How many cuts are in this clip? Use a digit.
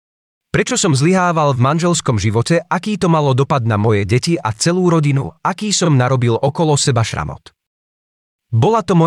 0